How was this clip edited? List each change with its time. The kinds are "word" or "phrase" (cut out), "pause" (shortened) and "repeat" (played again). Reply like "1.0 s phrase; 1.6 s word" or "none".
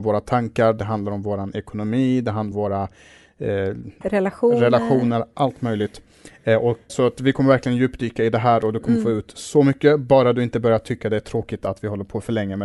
2.5 s word; 4.0 s word; 6.9 s word